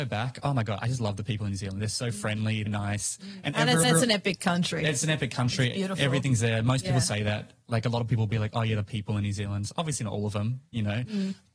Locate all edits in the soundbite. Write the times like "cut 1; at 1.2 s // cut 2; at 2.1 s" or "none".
cut 1; at 2.7 s // cut 2; at 3.8 s